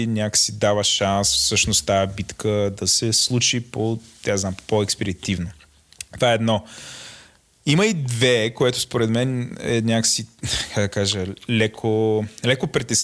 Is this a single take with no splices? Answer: yes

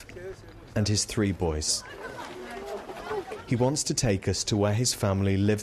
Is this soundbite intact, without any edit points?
yes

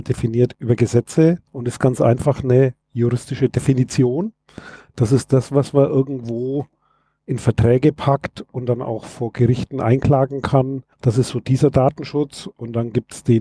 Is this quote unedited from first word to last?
no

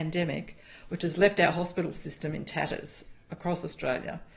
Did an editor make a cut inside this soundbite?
no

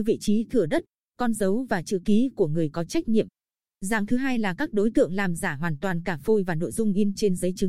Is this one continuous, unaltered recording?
yes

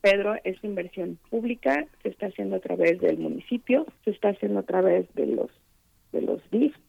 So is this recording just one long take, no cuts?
no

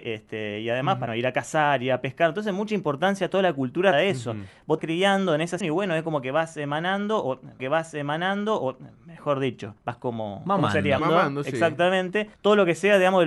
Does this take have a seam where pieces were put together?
yes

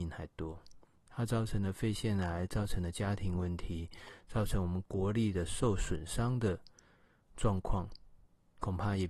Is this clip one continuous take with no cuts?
yes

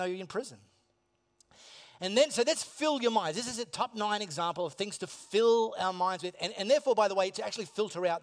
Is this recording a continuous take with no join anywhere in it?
yes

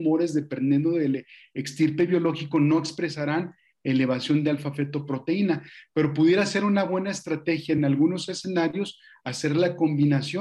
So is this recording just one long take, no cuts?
yes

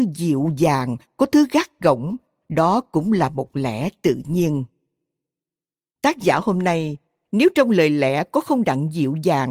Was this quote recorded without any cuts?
yes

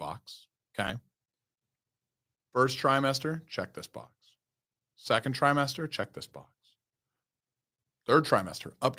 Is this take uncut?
yes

